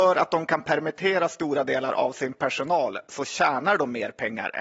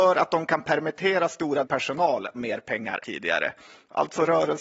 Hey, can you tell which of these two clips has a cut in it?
second; 3 cuts; at 1.6 s, 2.4 s, 3.0 s

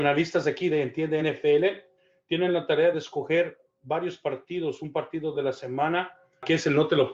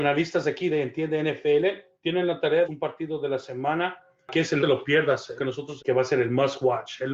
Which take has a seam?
second; 5 cuts; at 1.9 s, 2.6 s, 4.6 s, 5.4 s, 5.8 s

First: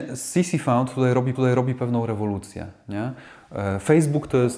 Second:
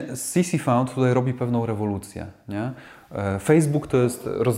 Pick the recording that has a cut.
first; 1 cut; at 1.3 s

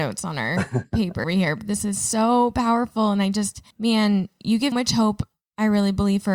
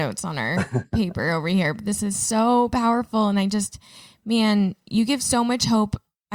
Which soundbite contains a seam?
first; 3 cuts; at 1.2 s, 3.7 s, 4.7 s

